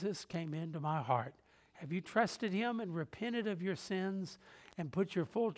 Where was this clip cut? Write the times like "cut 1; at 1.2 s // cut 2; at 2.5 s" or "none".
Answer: none